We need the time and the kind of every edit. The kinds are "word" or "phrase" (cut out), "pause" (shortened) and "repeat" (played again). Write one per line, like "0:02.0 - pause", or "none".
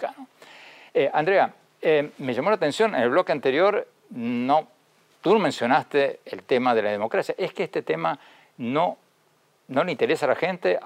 0:04.0 - word